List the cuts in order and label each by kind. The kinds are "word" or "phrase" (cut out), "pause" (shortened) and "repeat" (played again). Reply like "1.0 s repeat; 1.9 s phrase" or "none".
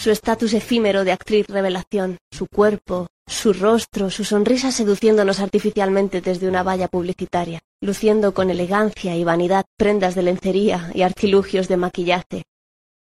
2.2 s pause; 3.1 s pause; 7.7 s pause